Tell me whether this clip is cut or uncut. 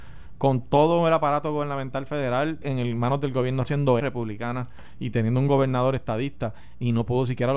cut